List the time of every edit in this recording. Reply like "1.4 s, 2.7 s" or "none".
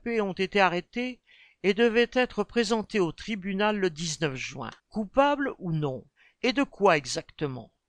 4.8 s, 6.2 s